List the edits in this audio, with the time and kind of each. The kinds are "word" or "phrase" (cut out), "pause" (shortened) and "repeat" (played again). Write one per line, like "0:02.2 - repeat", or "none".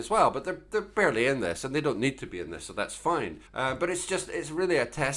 0:03.5 - pause